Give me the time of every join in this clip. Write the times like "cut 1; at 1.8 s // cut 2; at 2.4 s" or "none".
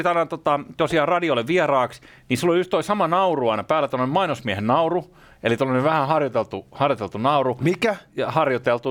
none